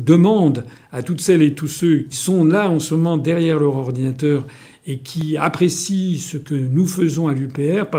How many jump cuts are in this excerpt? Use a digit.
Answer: 1